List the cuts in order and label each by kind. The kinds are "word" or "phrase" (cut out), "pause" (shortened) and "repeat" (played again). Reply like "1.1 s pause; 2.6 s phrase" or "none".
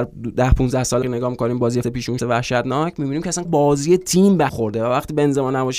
1.0 s word; 1.8 s word; 2.2 s word; 3.4 s word; 4.5 s word

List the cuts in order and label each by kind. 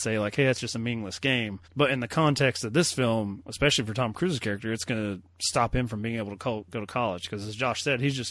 1.6 s pause

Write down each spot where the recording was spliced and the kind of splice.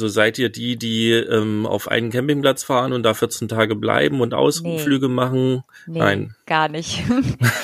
none

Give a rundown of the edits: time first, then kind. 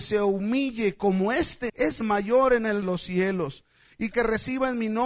1.7 s word; 2.0 s phrase; 2.8 s phrase; 4.1 s word

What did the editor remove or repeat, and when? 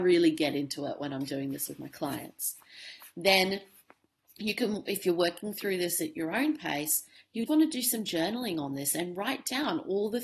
7.5 s word

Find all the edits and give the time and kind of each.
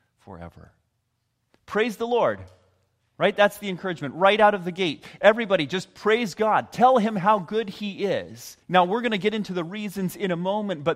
8.6 s pause

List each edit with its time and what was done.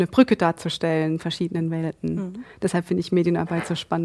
1.2 s word

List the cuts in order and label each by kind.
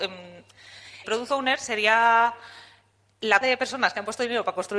1.0 s word; 3.4 s word

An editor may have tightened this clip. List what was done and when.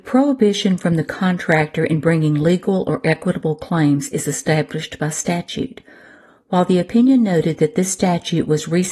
none

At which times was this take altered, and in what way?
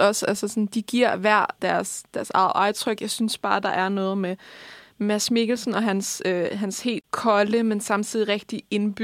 none

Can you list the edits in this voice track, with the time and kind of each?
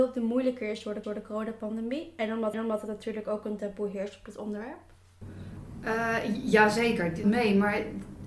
1.0 s repeat; 2.5 s repeat; 7.2 s phrase

